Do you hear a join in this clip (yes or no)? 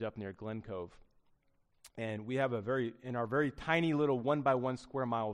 no